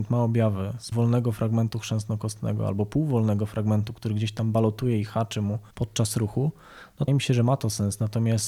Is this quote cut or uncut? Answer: cut